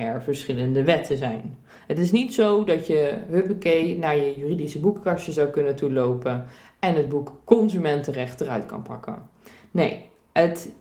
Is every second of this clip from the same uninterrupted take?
yes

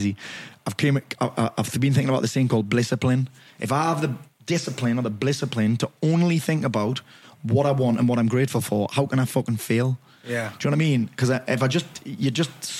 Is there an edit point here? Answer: no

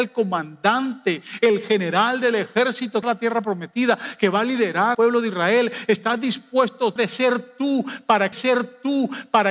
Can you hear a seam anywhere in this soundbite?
yes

